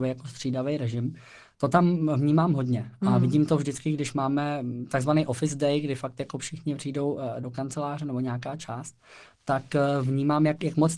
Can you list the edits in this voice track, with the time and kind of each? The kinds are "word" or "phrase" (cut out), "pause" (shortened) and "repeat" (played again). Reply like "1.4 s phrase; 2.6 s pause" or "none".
none